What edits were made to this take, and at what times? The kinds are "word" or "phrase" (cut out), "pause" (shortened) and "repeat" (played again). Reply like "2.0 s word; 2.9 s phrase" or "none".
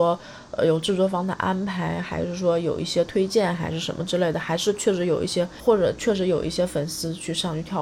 none

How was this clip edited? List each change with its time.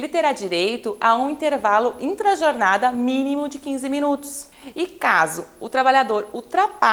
none

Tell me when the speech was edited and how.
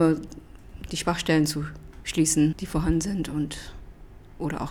2.5 s word

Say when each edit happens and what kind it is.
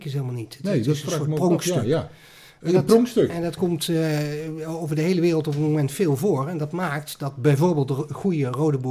none

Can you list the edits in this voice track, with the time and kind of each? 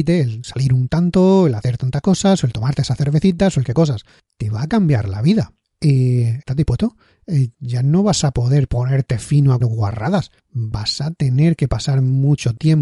3.7 s phrase; 9.6 s word

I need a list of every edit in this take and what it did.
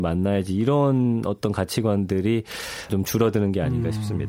2.9 s word

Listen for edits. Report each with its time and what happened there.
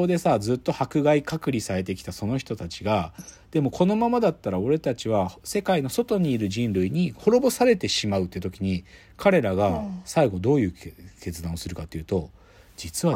none

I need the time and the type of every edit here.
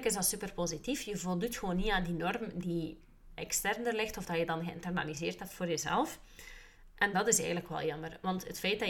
none

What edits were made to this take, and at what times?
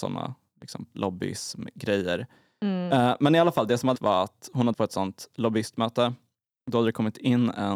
0.9 s word; 3.9 s word; 4.7 s word

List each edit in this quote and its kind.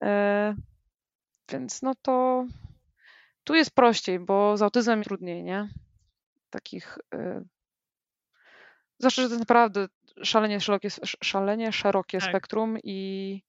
3.0 s pause; 5.0 s word

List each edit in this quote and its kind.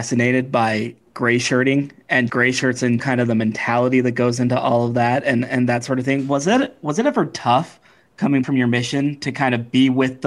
2.3 s word; 3.0 s word; 8.4 s word

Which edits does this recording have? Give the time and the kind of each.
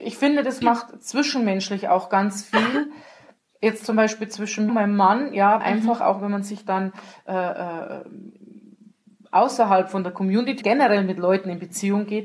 4.7 s word; 5.6 s phrase; 10.6 s phrase

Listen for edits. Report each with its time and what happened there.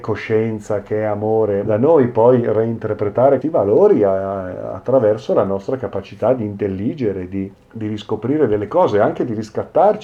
1.7 s phrase; 3.4 s word; 7.5 s pause

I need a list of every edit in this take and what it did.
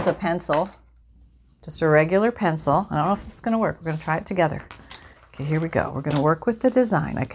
none

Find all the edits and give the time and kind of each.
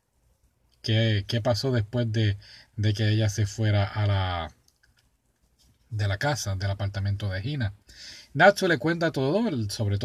none

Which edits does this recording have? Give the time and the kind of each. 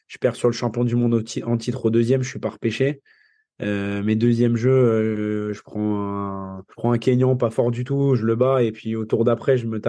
6.7 s pause

